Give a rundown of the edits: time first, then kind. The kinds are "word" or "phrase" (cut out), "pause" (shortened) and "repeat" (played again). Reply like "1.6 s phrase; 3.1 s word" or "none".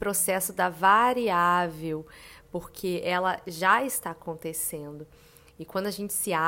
none